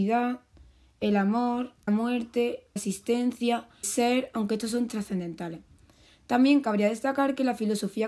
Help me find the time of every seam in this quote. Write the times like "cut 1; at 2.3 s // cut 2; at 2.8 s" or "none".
cut 1; at 1.9 s // cut 2; at 2.8 s // cut 3; at 3.8 s // cut 4; at 4.9 s